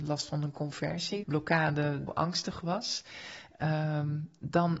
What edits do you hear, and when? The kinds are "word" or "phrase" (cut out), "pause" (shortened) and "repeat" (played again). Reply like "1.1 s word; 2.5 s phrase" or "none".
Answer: 1.2 s word; 2.1 s phrase